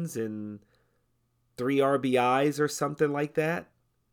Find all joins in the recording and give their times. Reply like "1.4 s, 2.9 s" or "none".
none